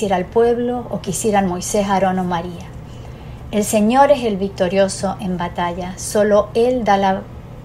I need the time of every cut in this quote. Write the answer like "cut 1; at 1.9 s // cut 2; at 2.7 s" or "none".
none